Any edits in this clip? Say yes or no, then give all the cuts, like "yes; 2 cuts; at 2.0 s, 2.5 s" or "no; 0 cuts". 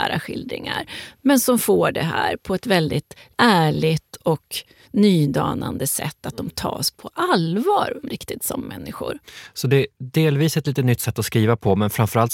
no; 0 cuts